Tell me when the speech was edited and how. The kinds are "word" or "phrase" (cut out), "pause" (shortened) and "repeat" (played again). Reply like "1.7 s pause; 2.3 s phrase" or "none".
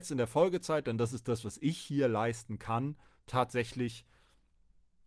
none